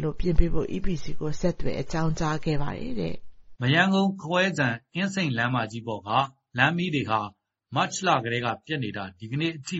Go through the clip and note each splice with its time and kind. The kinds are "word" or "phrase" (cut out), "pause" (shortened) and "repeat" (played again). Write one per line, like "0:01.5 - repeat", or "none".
none